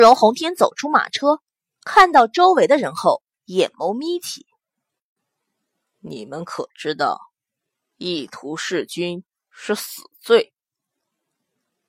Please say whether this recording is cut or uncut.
uncut